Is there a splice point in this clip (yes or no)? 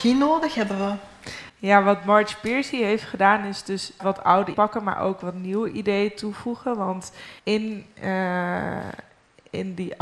yes